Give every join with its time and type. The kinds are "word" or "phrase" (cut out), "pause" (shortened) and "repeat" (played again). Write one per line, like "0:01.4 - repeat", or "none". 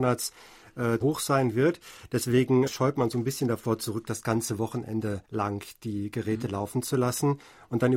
0:01.0 - word
0:02.7 - word
0:05.2 - pause